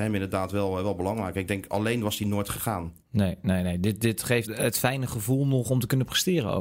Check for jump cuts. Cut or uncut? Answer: cut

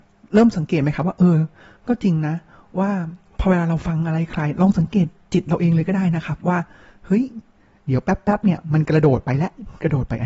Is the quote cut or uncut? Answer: uncut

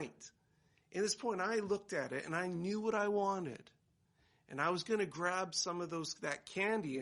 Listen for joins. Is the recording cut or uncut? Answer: uncut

